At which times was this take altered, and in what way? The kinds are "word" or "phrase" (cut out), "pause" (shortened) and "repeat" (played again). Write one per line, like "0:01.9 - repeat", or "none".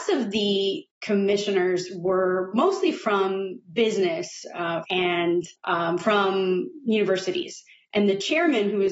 0:00.9 - pause
0:04.8 - phrase
0:05.5 - pause

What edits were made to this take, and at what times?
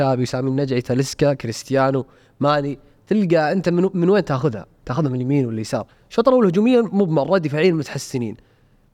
none

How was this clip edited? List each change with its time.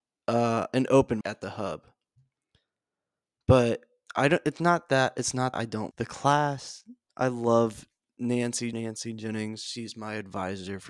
0:01.2 - word
0:05.5 - word
0:05.9 - word
0:08.7 - word

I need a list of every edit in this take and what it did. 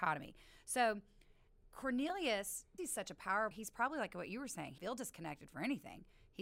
0:02.8 - word
0:03.5 - word
0:04.8 - word

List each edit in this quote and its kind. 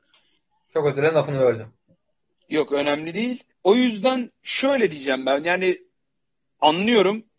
0:02.2 - pause
0:03.5 - pause

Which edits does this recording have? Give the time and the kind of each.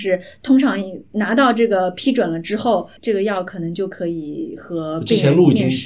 0:03.0 - pause

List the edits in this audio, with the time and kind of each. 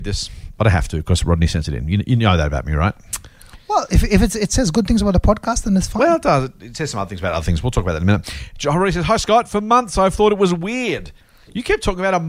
none

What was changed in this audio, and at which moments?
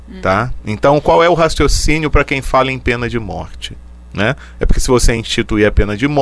none

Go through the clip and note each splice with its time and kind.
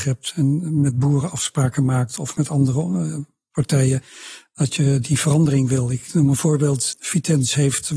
0:06.1 - word

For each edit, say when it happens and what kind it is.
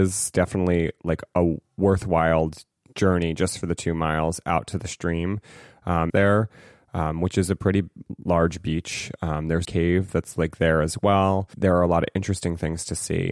0:06.1 - phrase
0:09.6 - phrase

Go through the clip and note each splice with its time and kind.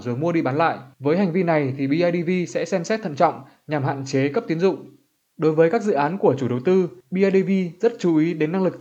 0:00.9 - pause
0:07.0 - pause

